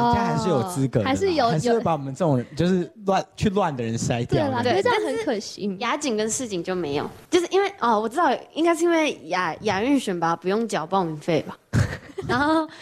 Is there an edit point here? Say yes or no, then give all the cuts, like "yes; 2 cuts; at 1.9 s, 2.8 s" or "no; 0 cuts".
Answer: yes; 1 cut; at 7.3 s